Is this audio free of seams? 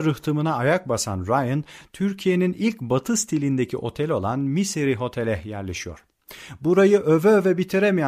yes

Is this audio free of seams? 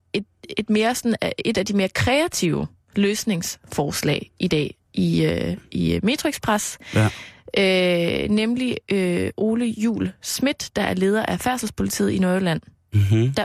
no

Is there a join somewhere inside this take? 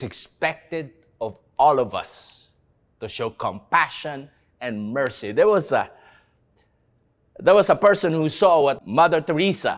no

